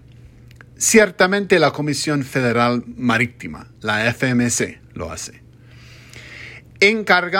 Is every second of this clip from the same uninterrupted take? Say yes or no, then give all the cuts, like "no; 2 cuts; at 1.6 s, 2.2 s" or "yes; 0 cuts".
no; 1 cut; at 3.7 s